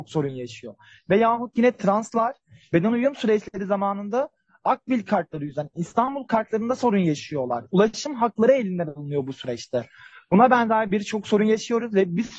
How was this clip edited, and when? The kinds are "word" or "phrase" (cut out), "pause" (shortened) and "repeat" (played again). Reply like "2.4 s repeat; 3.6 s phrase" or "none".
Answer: none